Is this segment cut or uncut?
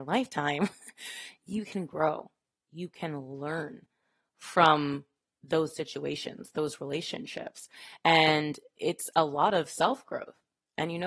uncut